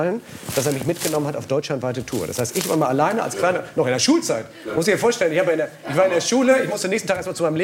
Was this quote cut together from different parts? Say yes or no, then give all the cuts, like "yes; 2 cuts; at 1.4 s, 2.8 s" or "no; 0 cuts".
no; 0 cuts